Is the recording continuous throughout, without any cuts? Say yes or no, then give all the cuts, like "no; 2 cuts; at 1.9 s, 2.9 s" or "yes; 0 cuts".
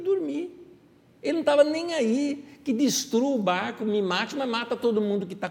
yes; 0 cuts